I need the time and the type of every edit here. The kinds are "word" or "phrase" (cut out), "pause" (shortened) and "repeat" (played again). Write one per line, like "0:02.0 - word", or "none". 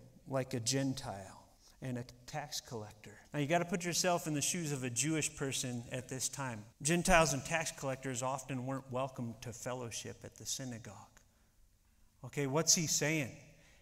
0:01.6 - pause
0:03.2 - pause
0:06.7 - pause